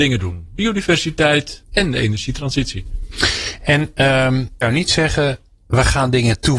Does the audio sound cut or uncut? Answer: cut